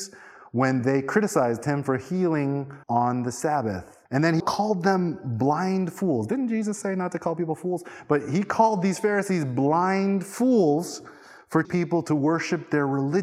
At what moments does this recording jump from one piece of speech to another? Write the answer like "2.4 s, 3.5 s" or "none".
2.8 s, 4.1 s, 4.4 s, 11.6 s